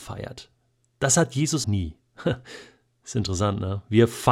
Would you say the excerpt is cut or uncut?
cut